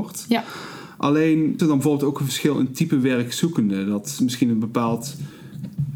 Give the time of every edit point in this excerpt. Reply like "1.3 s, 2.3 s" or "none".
1.6 s